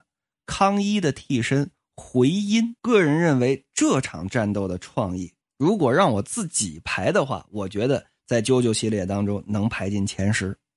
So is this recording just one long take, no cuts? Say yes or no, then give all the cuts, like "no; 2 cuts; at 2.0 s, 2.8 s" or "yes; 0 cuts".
no; 2 cuts; at 2.8 s, 5.4 s